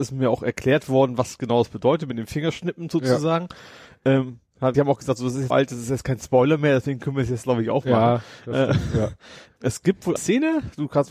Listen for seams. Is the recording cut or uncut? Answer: cut